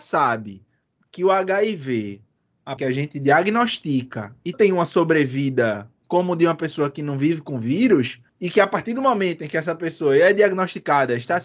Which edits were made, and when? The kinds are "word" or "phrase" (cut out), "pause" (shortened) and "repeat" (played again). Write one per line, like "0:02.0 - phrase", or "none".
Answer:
0:02.8 - phrase
0:04.5 - phrase
0:08.3 - pause